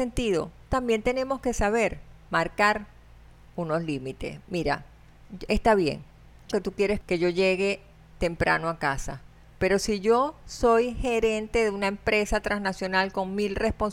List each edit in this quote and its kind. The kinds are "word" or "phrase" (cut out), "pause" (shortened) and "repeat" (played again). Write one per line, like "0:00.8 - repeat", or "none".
0:06.5 - word